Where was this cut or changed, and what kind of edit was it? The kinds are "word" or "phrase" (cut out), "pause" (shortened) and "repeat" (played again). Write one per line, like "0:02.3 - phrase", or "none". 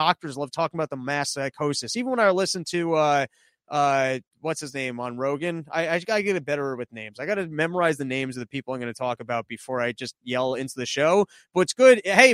none